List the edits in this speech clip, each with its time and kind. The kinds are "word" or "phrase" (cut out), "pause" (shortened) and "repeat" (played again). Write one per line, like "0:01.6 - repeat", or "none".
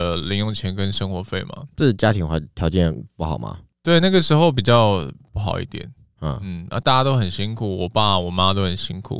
0:01.7 - pause